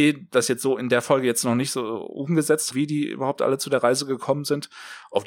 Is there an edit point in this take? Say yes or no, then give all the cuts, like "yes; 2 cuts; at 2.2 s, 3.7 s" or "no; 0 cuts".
yes; 1 cut; at 2.7 s